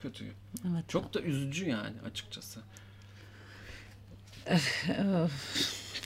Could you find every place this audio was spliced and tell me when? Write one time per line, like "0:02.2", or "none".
none